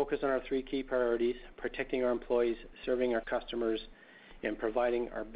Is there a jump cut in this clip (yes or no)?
no